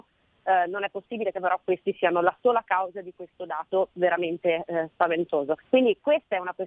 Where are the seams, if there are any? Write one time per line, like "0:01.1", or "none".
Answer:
0:05.6